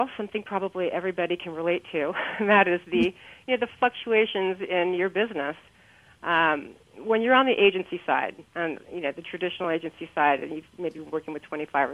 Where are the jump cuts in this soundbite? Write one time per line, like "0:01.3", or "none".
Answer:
none